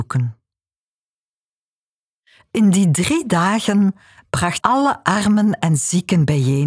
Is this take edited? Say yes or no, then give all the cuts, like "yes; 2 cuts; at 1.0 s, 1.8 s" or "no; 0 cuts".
yes; 1 cut; at 4.6 s